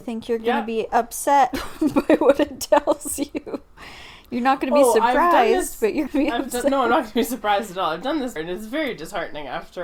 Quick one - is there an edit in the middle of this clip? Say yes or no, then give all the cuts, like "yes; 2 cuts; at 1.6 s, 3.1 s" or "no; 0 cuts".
yes; 2 cuts; at 6.1 s, 8.4 s